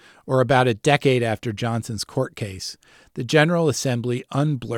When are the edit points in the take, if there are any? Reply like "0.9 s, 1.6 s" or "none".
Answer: none